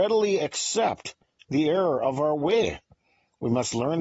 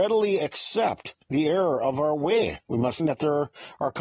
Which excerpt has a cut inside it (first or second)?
second